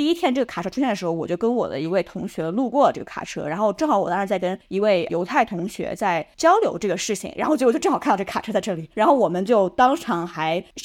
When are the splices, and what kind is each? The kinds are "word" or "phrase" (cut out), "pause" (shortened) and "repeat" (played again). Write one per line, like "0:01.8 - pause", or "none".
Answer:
0:04.6 - pause
0:08.9 - pause